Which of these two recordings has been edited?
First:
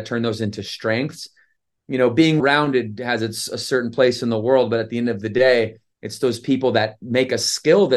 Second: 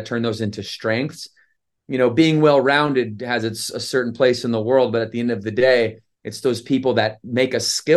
first; 1 cut; at 2.4 s

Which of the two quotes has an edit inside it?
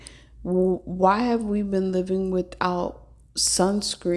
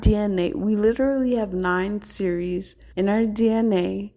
second; 1 cut; at 2.9 s

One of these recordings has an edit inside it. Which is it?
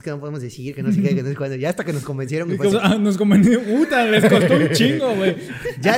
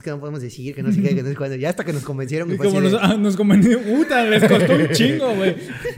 first; 1 cut; at 2.7 s

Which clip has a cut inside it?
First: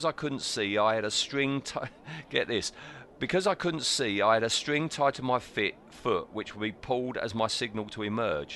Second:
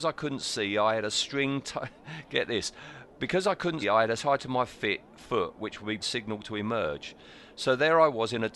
second; 3 cuts; at 3.8 s, 4.2 s, 6.0 s

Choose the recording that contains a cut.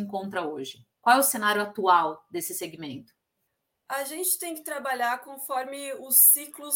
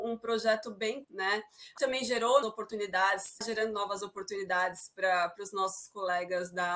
second; 4 cuts; at 1.0 s, 1.8 s, 2.4 s, 3.4 s

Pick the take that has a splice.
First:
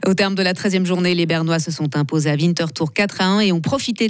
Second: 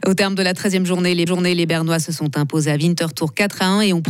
second; 1 cut; at 1.3 s

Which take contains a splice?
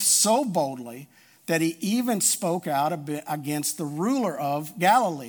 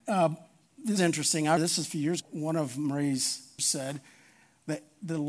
second; 4 cuts; at 1.0 s, 1.6 s, 2.2 s, 3.6 s

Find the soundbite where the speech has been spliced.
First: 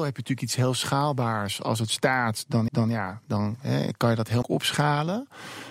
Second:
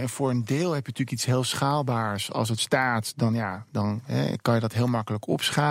first; 2 cuts; at 2.7 s, 4.4 s

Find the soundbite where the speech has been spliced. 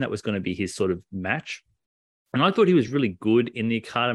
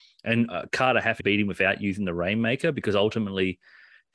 second; 1 cut; at 1.2 s

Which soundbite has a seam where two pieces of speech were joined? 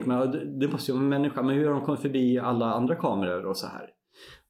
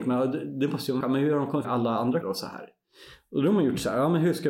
second; 3 cuts; at 1.0 s, 1.6 s, 2.2 s

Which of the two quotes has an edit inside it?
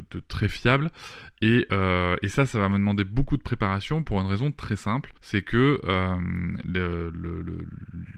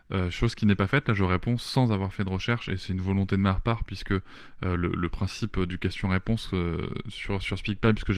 first; 1 cut; at 5.2 s

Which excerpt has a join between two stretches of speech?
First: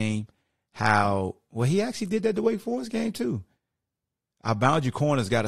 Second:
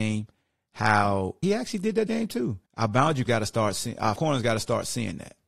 second; 5 cuts; at 1.4 s, 2.1 s, 2.7 s, 3.3 s, 4.2 s

